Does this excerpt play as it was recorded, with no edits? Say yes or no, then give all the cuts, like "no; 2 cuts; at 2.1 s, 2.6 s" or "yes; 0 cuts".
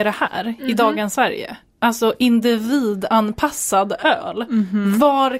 yes; 0 cuts